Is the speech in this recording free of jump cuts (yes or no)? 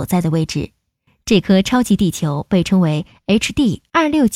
yes